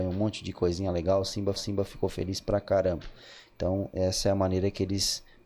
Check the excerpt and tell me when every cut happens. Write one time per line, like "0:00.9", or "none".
0:01.6